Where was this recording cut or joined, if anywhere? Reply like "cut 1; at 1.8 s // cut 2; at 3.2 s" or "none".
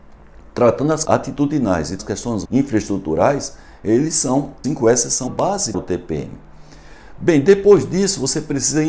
cut 1; at 1.0 s // cut 2; at 2.0 s // cut 3; at 2.4 s // cut 4; at 4.6 s // cut 5; at 5.3 s // cut 6; at 5.7 s

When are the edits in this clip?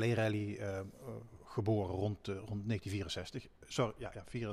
none

